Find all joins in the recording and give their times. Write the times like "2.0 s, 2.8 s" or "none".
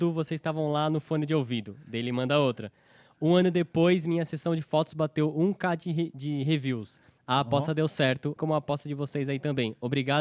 8.4 s